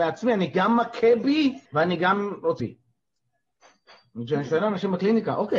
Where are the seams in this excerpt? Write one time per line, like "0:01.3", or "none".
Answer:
0:01.7
0:02.6